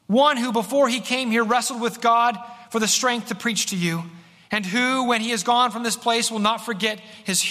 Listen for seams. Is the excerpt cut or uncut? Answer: uncut